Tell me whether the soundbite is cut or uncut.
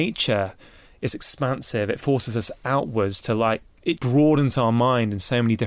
cut